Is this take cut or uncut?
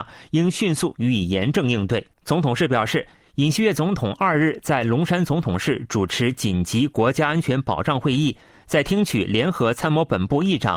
cut